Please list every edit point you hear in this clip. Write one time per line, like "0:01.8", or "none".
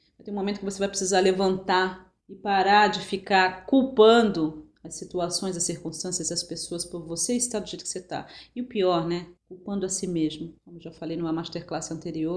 0:02.2
0:09.4
0:10.6